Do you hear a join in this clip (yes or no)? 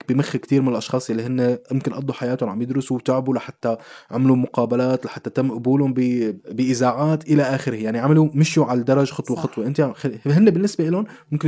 no